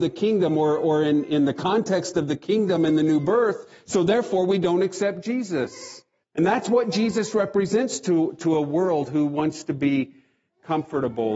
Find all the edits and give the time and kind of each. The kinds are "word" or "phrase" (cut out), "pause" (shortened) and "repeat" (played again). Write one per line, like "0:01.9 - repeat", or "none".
0:06.2 - pause